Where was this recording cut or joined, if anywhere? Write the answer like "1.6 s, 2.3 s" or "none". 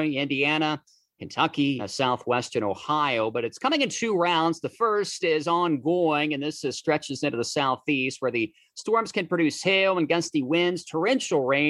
1.2 s, 1.8 s

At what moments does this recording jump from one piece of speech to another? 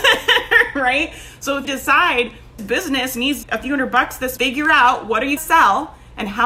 1.6 s, 2.6 s, 3.4 s, 4.4 s, 5.4 s

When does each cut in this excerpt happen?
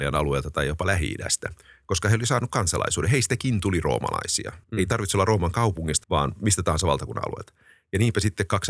4.6 s, 6.0 s

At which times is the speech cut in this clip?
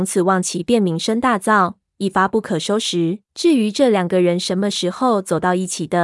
3.2 s

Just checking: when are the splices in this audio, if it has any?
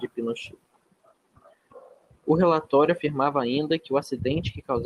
none

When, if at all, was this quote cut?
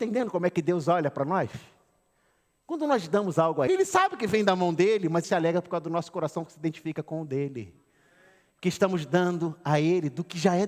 3.7 s, 5.2 s

